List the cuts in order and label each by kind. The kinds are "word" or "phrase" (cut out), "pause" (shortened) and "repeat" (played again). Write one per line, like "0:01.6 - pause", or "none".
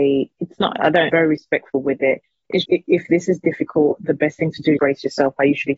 0:01.1 - word
0:02.6 - word
0:04.8 - word